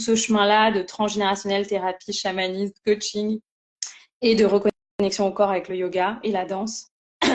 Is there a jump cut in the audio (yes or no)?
no